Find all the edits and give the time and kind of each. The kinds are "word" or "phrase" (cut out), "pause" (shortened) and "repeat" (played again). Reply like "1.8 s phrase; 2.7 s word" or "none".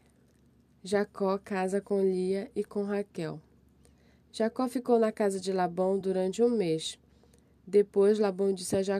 none